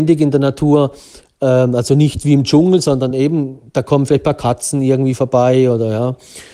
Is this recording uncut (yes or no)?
yes